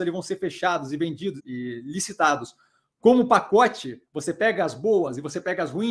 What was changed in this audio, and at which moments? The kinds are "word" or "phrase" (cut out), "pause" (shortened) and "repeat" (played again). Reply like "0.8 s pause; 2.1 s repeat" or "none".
1.4 s word